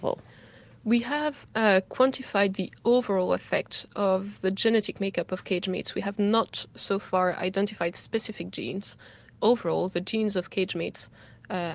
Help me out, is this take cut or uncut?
uncut